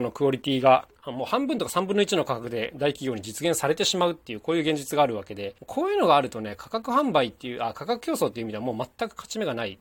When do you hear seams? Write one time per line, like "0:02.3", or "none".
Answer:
0:01.0
0:05.6